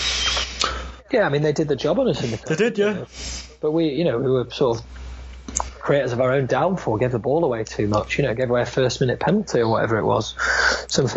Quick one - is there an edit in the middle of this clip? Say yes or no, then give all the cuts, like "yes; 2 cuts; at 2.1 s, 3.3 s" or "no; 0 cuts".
no; 0 cuts